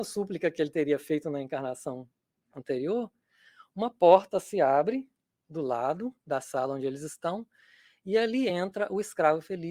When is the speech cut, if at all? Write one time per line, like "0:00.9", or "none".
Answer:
none

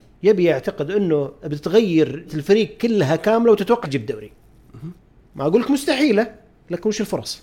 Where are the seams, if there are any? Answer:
0:02.3
0:03.8
0:05.2

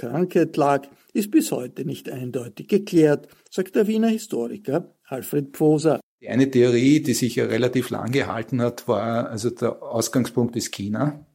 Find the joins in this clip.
none

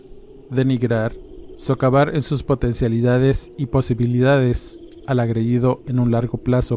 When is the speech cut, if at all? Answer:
none

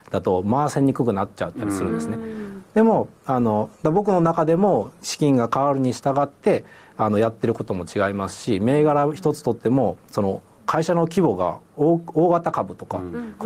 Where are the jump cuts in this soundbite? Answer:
none

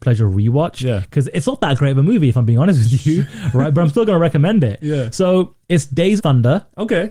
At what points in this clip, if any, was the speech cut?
0:06.2

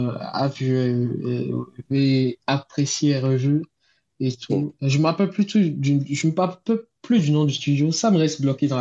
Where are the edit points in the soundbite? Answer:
none

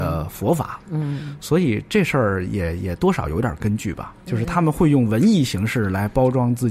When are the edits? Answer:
none

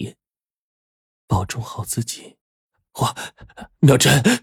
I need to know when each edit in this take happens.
0:02.4

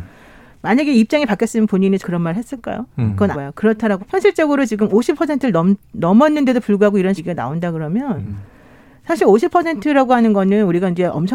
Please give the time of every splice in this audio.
0:02.0
0:03.3
0:04.0
0:07.2

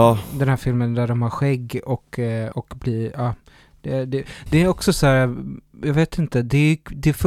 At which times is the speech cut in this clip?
0:02.5
0:04.5

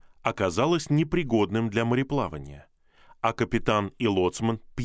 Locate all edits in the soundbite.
none

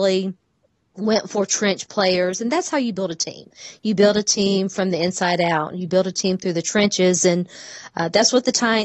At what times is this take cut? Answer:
none

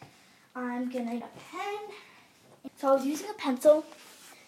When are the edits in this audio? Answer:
0:01.2
0:02.7

